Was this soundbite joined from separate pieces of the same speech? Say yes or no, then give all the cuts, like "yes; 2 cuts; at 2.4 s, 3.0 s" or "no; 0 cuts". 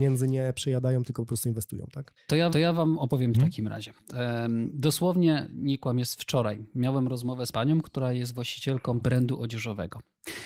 yes; 4 cuts; at 2.5 s, 3.3 s, 7.5 s, 9.0 s